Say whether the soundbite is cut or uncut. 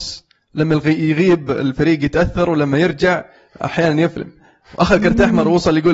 uncut